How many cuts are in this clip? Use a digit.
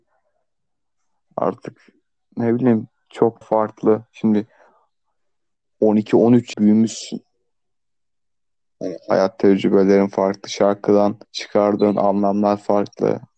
3